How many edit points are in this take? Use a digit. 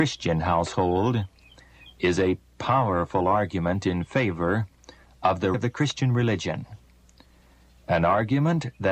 1